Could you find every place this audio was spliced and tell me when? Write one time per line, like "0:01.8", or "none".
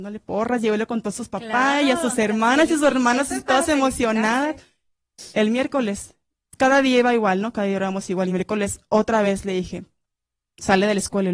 none

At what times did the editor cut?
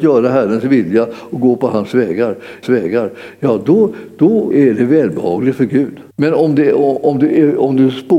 0:02.6
0:04.5
0:06.1

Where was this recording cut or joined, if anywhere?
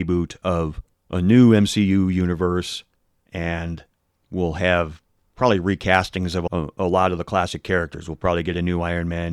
0:00.9

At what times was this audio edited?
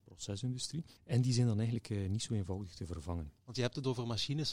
0:01.0
0:03.4

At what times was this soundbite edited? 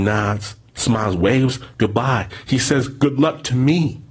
none

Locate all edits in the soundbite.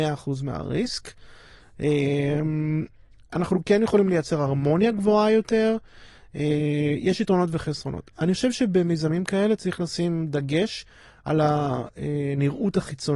none

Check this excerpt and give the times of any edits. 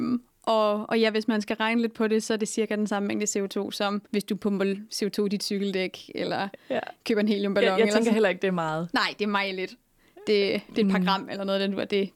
0:04.1

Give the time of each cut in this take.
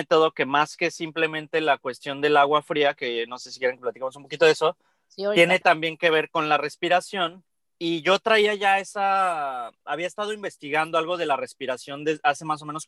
0:07.5

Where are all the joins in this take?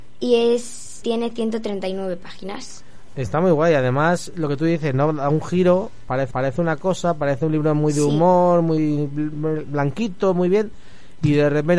0:01.0
0:06.3

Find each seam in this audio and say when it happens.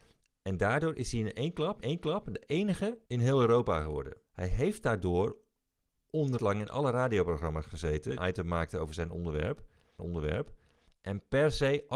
0:01.8
0:03.1
0:04.3
0:06.4
0:08.2
0:10.0

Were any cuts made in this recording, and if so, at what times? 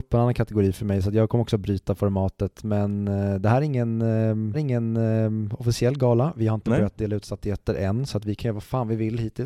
0:04.5

